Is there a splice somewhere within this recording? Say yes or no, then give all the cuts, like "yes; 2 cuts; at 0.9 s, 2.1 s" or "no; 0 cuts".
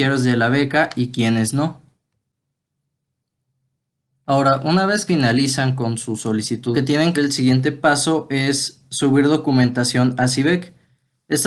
yes; 3 cuts; at 5.1 s, 6.7 s, 7.1 s